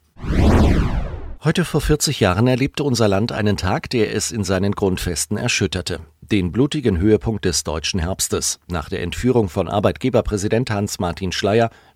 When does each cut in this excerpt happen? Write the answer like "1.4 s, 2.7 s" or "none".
none

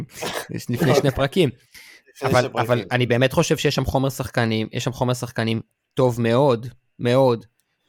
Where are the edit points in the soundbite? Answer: none

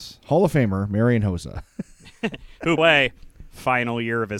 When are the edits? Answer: 2.8 s

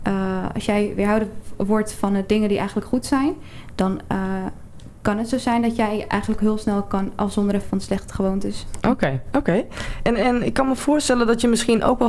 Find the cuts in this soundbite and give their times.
6.4 s, 7.6 s

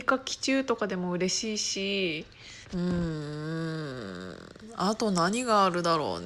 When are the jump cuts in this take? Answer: 2.6 s

